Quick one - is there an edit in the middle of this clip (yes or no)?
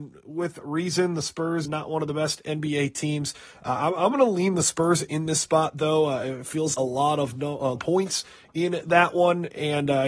yes